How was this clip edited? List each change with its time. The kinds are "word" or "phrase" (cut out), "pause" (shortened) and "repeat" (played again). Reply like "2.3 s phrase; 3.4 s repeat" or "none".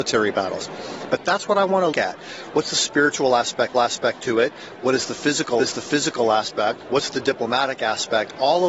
1.9 s word; 3.7 s repeat; 5.6 s repeat